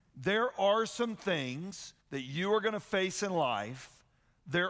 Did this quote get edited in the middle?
yes; 1 cut; at 2.0 s

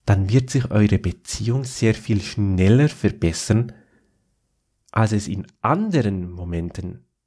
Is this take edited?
no; 0 cuts

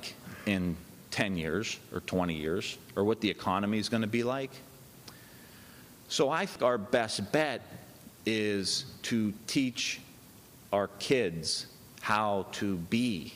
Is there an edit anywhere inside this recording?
no; 0 cuts

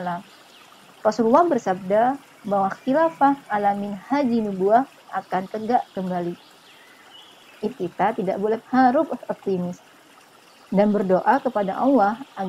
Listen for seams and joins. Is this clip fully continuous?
no; 2 cuts; at 7.7 s, 8.6 s

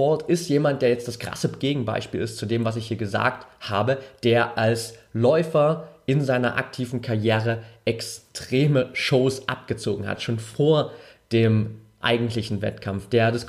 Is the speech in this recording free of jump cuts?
yes; 0 cuts

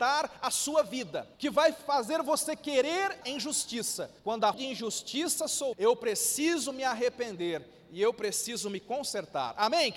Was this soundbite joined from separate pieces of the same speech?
yes; 5 cuts; at 1.3 s, 3.2 s, 4.2 s, 4.5 s, 5.7 s

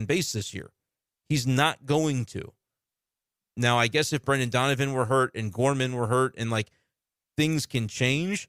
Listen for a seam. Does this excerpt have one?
no; 0 cuts

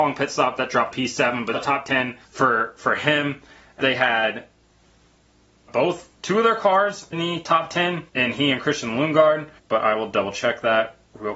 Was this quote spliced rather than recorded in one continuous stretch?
yes; 8 cuts; at 0.9 s, 1.5 s, 2.2 s, 3.8 s, 5.7 s, 7.1 s, 8.1 s, 9.6 s

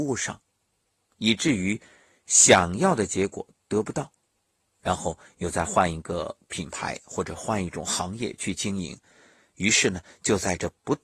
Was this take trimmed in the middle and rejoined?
no; 0 cuts

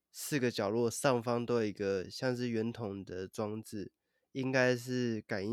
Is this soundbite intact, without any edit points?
yes; 0 cuts

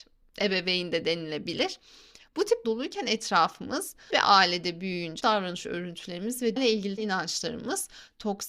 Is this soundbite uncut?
no; 5 cuts; at 2.6 s, 4.1 s, 5.2 s, 6.6 s, 7.0 s

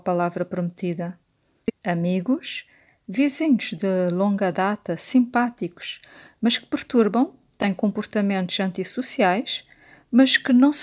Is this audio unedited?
yes; 0 cuts

